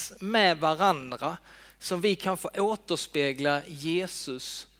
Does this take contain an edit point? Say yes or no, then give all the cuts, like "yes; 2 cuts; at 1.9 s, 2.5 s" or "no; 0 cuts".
no; 0 cuts